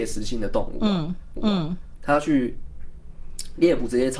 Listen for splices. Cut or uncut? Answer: cut